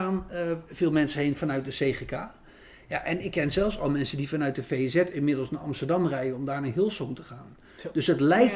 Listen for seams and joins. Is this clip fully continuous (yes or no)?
yes